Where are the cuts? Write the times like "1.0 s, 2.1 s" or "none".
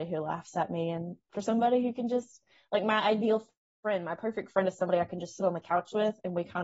none

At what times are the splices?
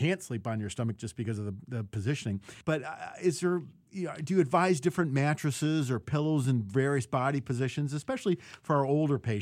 2.6 s

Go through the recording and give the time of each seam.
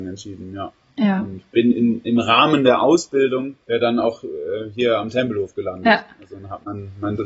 3.6 s

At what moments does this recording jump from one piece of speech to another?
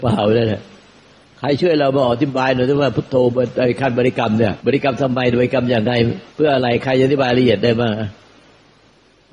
4.6 s, 6.3 s

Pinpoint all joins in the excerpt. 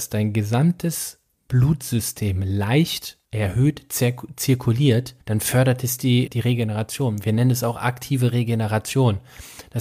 3.2 s, 5.2 s, 6.3 s

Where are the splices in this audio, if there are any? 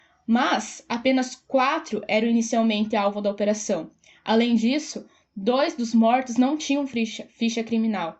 none

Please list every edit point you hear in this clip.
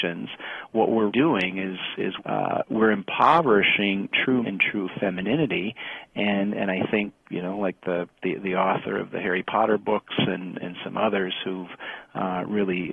1.1 s, 2.2 s, 4.4 s, 10.6 s

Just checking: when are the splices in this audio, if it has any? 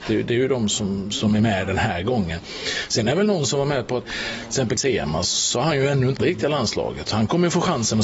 4.0 s, 4.8 s, 6.2 s

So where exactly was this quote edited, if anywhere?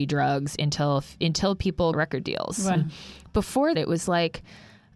1.9 s, 2.8 s, 3.8 s

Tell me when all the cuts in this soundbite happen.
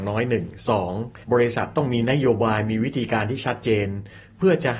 1.2 s

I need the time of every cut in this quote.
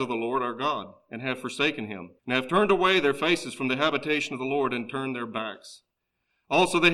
2.2 s

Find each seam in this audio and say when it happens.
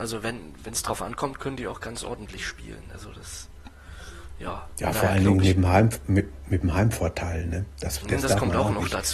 none

